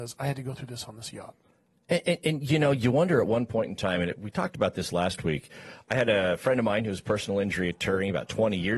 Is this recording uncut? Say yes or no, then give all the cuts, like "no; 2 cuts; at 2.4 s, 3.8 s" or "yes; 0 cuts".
yes; 0 cuts